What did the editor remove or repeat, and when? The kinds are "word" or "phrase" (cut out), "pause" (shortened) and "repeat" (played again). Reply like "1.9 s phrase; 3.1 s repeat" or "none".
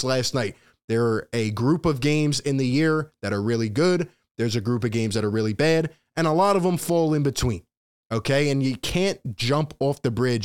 none